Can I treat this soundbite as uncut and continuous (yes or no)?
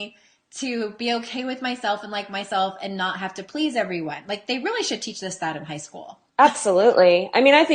no